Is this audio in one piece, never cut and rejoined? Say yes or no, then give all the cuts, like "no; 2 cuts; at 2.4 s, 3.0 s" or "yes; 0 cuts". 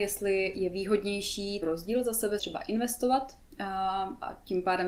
no; 2 cuts; at 1.6 s, 2.4 s